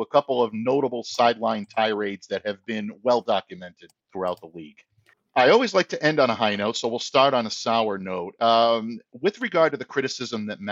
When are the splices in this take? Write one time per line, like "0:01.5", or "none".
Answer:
0:04.0
0:05.1